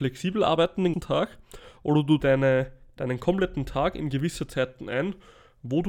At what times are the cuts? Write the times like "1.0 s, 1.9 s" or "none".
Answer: 0.9 s, 2.2 s